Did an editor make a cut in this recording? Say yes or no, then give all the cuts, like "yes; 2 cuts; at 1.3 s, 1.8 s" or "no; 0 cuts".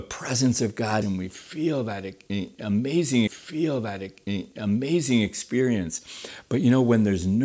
yes; 2 cuts; at 1.0 s, 3.3 s